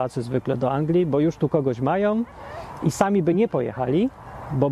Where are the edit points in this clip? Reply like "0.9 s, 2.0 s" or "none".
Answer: none